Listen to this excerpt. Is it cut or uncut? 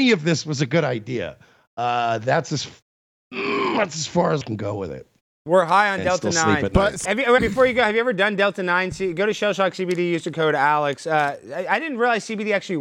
cut